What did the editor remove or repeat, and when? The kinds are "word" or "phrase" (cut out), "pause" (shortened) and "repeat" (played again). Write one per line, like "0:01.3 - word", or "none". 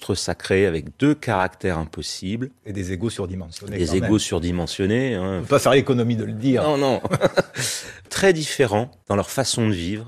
none